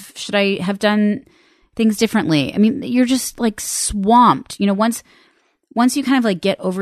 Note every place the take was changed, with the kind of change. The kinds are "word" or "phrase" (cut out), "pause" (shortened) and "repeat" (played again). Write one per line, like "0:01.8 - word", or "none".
none